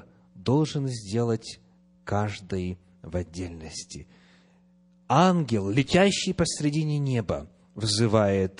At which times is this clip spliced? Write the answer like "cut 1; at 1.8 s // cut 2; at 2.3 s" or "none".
none